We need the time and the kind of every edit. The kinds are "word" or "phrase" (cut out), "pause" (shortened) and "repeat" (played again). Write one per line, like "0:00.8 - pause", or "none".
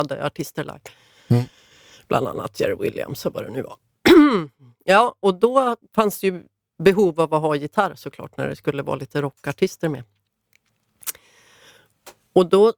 0:05.8 - pause

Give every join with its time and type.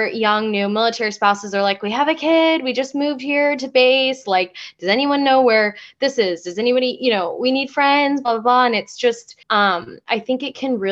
0:09.4 - pause

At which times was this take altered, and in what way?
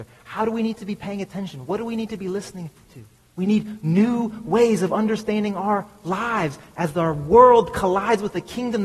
0:03.1 - pause

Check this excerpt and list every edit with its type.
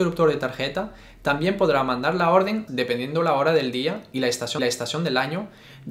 0:02.7 - phrase
0:04.6 - repeat

